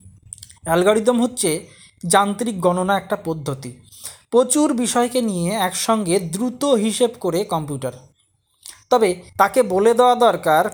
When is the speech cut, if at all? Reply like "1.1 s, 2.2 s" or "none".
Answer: 9.3 s